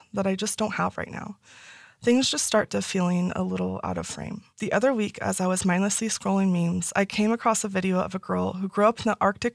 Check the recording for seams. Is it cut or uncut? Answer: cut